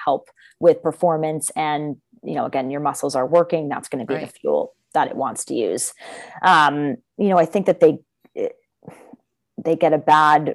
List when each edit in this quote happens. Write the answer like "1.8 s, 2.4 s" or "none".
none